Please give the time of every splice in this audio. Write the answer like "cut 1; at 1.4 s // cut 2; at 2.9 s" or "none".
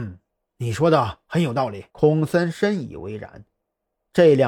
cut 1; at 1.9 s